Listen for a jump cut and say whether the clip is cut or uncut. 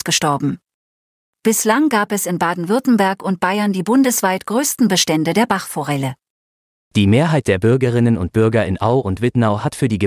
uncut